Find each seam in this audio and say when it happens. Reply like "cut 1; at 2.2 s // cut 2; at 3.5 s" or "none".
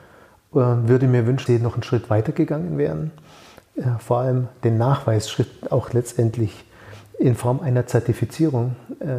cut 1; at 1.5 s